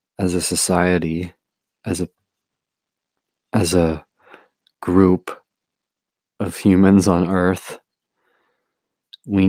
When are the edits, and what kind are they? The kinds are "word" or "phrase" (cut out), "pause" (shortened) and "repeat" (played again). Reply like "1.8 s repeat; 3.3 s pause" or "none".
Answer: none